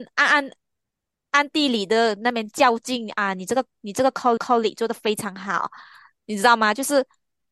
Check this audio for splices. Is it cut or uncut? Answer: cut